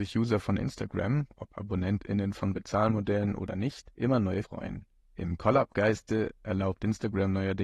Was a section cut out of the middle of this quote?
yes; 2 cuts; at 3.9 s, 4.4 s

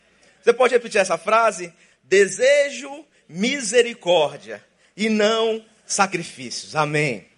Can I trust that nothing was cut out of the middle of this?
yes; 0 cuts

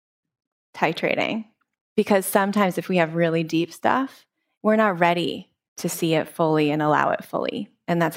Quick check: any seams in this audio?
yes; 1 cut; at 1.6 s

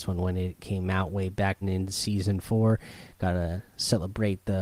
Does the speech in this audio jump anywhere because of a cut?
yes; 1 cut; at 1.6 s

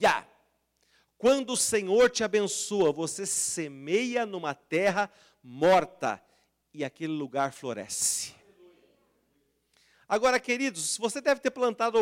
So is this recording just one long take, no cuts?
yes; 0 cuts

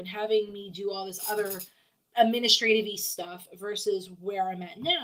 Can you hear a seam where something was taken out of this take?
no; 0 cuts

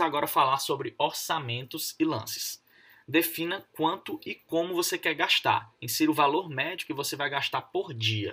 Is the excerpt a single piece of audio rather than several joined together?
yes; 0 cuts

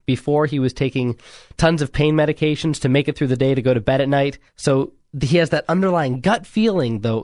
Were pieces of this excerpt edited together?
yes; 1 cut; at 4.5 s

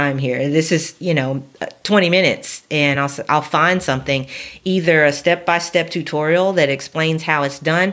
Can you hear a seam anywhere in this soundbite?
no; 0 cuts

